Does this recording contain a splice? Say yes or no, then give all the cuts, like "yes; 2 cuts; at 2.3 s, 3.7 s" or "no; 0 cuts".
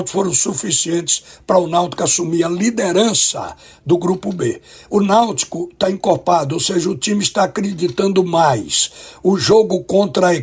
no; 0 cuts